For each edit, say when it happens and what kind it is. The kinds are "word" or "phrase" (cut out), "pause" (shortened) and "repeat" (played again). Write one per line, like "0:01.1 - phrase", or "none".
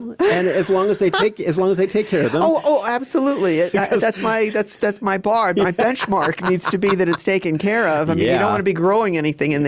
0:04.8 - word